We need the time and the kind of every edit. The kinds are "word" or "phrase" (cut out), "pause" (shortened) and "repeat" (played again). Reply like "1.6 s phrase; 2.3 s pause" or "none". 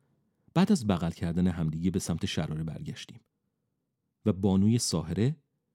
none